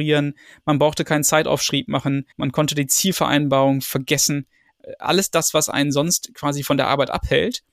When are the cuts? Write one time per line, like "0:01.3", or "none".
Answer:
0:02.3